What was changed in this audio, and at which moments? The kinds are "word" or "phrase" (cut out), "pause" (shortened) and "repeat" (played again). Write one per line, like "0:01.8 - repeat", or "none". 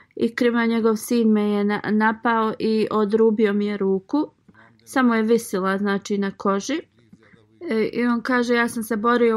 none